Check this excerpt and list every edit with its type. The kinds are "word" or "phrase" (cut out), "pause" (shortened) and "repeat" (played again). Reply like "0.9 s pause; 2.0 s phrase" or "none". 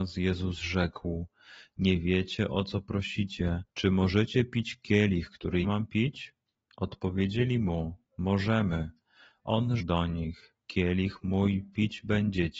3.7 s pause; 5.6 s word; 9.8 s word